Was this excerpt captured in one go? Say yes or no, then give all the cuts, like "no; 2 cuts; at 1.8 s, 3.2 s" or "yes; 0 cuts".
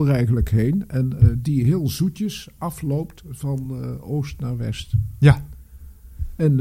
yes; 0 cuts